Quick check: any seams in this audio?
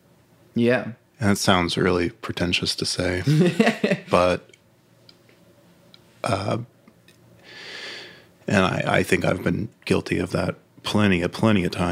no; 0 cuts

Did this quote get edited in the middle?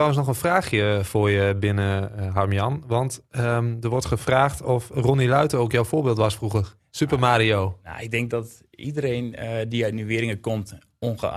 no; 0 cuts

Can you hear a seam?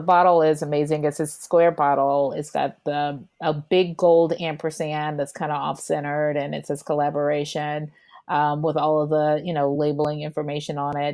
no; 0 cuts

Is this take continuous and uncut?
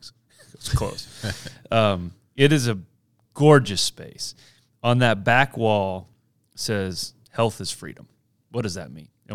yes; 0 cuts

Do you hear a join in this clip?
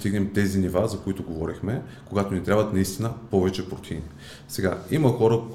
no; 0 cuts

